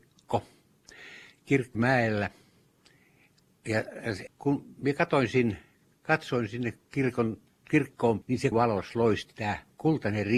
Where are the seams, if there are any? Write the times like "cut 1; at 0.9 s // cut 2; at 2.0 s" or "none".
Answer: cut 1; at 1.7 s // cut 2; at 4.3 s // cut 3; at 8.2 s // cut 4; at 8.5 s